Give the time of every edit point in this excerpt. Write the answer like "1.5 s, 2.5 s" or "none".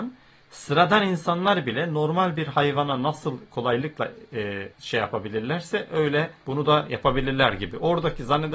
4.7 s, 6.4 s

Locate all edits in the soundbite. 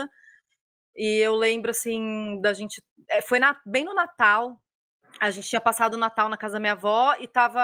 none

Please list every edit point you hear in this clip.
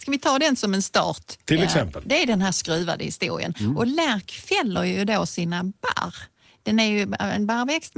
none

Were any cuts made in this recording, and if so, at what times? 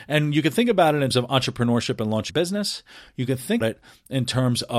1.1 s, 2.3 s, 3.6 s

